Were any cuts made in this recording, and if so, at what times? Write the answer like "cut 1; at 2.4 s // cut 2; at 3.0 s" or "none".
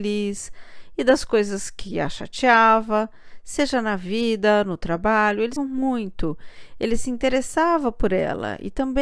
cut 1; at 5.6 s